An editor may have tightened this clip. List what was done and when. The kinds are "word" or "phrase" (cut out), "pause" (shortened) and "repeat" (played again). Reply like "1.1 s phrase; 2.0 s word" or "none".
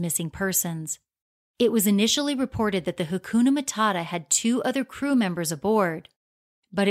none